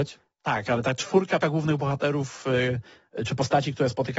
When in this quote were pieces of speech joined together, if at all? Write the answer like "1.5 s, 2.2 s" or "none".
1.4 s